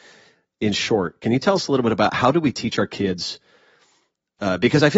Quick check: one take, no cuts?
yes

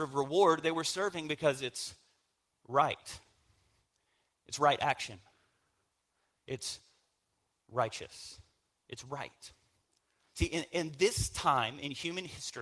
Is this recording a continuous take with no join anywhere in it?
yes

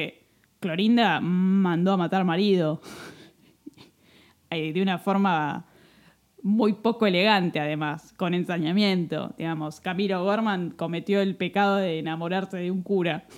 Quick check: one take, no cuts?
yes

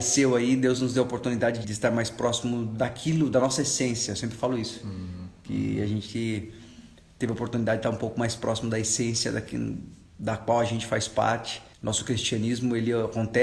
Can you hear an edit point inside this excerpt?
yes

